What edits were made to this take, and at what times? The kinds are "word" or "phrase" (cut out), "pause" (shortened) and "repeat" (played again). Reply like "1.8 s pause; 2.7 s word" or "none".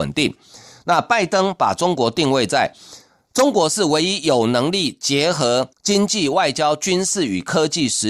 5.7 s pause